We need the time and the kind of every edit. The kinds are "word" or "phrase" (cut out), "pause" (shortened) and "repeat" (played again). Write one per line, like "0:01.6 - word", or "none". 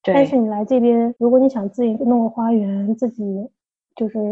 0:01.2 - pause